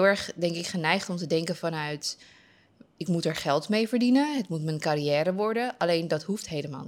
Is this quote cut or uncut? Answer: uncut